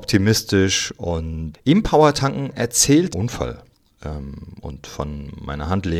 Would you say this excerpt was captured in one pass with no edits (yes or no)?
no